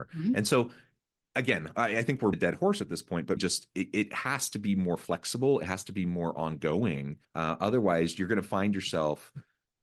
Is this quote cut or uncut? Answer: cut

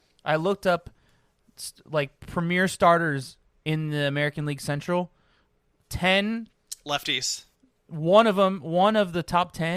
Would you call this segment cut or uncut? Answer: uncut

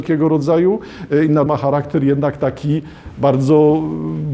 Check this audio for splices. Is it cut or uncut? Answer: cut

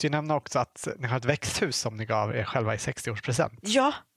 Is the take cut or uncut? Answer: uncut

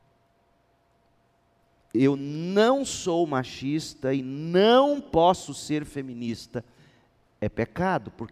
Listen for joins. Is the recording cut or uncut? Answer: uncut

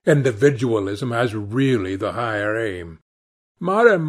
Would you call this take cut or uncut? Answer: uncut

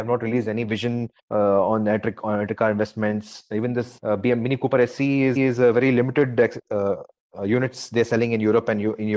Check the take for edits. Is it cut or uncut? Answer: cut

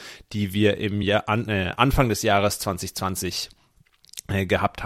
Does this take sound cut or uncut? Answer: uncut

